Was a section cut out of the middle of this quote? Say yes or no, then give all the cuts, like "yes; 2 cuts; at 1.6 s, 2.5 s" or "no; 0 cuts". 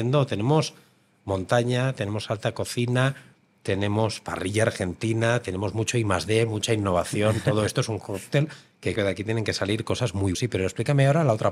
yes; 2 cuts; at 9.0 s, 10.3 s